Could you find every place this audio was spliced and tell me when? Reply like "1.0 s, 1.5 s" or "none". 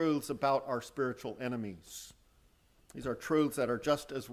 none